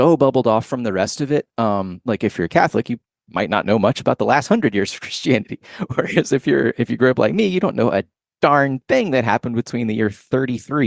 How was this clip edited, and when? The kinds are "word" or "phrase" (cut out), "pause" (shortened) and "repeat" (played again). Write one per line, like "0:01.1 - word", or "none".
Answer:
none